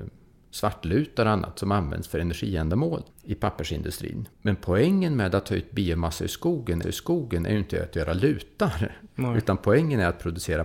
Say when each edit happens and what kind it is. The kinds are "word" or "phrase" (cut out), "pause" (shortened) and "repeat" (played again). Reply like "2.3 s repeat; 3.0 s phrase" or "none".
3.1 s pause; 4.3 s pause; 6.8 s repeat

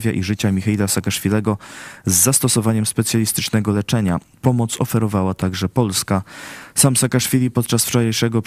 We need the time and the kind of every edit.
none

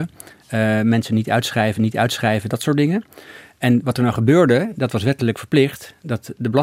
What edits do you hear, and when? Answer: 1.7 s repeat

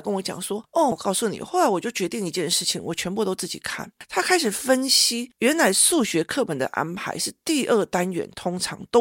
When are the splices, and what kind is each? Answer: 0.9 s word

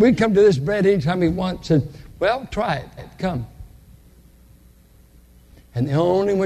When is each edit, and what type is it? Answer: 3.0 s repeat

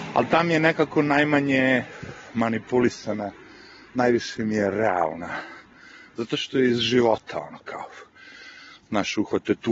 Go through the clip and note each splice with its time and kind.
none

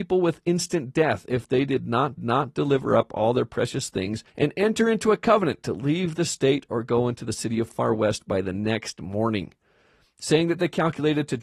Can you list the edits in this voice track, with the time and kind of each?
2.2 s repeat; 4.3 s pause

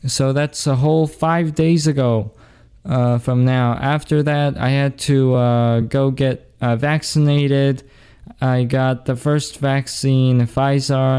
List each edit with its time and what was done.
none

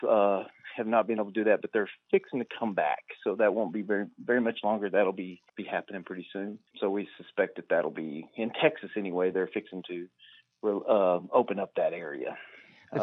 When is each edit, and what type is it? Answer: 5.5 s pause; 6.7 s pause

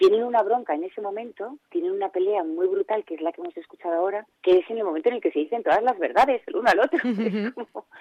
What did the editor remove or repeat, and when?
1.6 s pause; 4.3 s pause

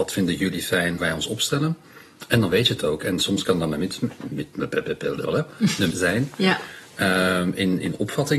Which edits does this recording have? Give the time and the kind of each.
1.0 s word; 5.9 s word

